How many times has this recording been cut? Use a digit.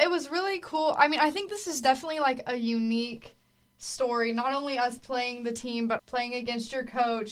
1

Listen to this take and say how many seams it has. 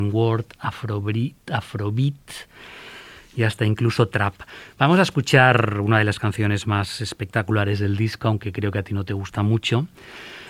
0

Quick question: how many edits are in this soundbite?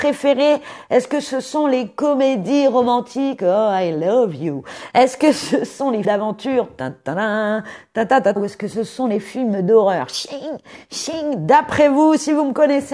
2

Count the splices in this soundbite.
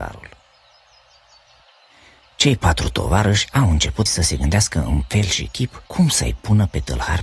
2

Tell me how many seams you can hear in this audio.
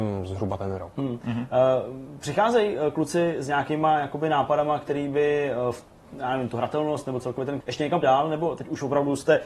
2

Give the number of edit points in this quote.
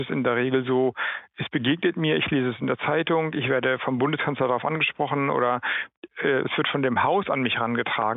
0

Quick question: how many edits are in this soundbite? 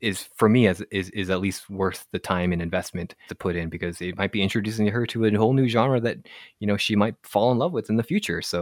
1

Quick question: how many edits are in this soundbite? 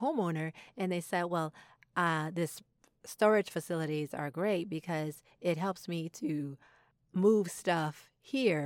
0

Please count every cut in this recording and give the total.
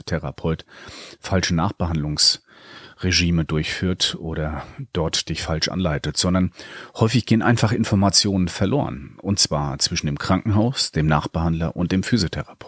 0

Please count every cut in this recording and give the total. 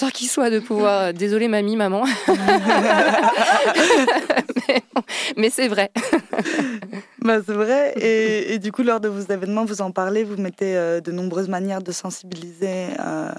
0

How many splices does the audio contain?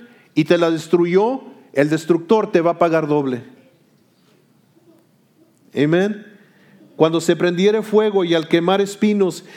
0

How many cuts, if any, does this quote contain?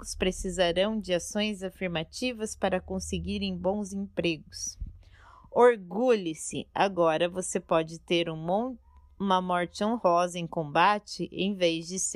0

